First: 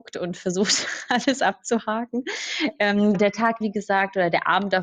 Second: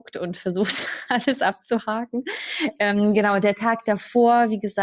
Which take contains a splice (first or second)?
first